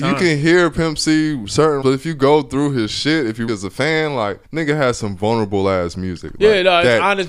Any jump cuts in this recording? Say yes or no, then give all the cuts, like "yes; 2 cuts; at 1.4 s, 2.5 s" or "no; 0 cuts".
yes; 3 cuts; at 1.8 s, 3.5 s, 4.4 s